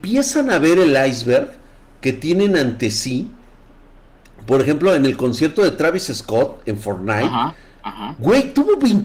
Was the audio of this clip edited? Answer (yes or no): no